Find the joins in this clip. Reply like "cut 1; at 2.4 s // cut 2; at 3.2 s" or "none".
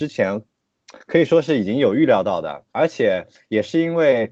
cut 1; at 2.7 s